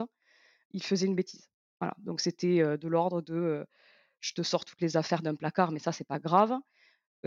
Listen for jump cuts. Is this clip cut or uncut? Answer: uncut